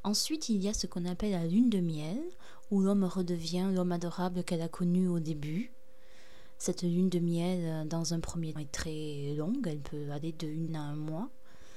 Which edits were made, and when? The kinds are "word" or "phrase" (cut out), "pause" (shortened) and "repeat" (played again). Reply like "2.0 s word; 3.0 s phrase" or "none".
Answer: 8.6 s word; 10.7 s word